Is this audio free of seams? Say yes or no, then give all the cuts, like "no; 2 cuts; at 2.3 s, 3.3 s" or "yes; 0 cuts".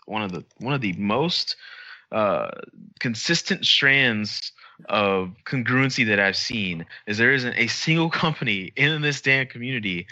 no; 2 cuts; at 2.9 s, 5.4 s